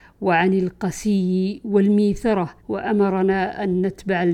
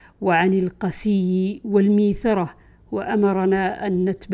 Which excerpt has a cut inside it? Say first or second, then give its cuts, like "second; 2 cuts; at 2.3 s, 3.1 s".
first; 1 cut; at 2.6 s